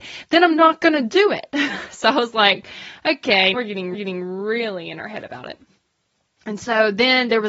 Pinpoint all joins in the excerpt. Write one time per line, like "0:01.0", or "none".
0:03.5
0:03.9